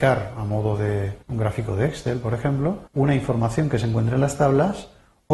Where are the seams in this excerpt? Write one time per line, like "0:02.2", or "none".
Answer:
0:01.2
0:02.9